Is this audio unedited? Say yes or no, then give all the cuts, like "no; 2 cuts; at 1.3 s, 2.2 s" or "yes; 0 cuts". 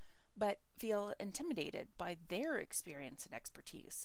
yes; 0 cuts